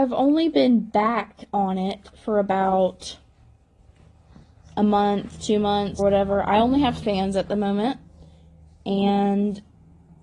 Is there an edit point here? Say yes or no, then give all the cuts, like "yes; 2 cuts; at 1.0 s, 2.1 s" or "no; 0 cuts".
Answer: yes; 2 cuts; at 6.0 s, 7.0 s